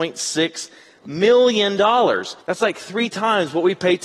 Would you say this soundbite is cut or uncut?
cut